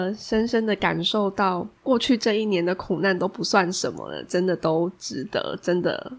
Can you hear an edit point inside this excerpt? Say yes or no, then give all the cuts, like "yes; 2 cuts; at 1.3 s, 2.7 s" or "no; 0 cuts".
yes; 1 cut; at 1.8 s